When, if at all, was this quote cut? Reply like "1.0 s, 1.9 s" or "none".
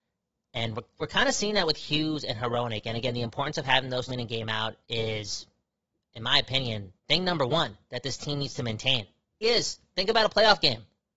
4.1 s, 4.8 s, 7.0 s, 9.4 s